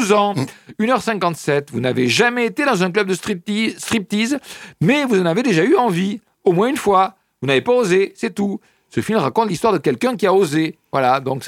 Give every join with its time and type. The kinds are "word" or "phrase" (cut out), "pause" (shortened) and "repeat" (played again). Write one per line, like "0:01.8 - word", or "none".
none